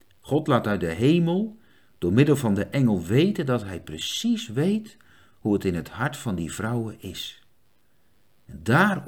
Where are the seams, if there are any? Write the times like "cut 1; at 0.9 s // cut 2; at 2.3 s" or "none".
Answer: none

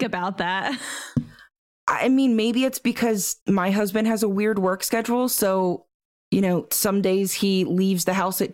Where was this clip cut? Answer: cut 1; at 3.4 s // cut 2; at 6.0 s

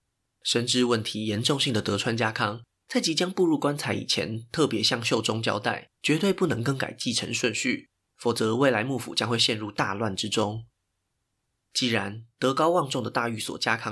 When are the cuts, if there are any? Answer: cut 1; at 5.9 s

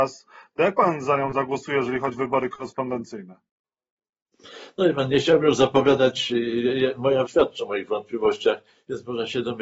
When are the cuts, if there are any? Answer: cut 1; at 2.1 s // cut 2; at 7.3 s

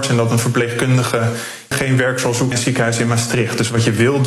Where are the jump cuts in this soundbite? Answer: cut 1; at 1.7 s // cut 2; at 2.5 s

